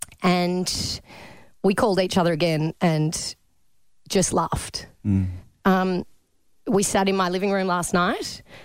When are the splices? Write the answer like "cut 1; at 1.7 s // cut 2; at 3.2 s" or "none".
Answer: none